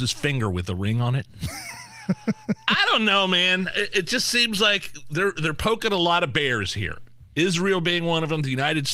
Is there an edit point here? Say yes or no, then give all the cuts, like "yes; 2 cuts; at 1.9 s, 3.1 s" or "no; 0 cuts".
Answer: no; 0 cuts